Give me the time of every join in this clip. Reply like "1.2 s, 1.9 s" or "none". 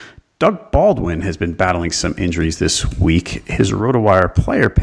none